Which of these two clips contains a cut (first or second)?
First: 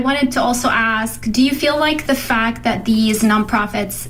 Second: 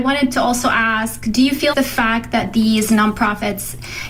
second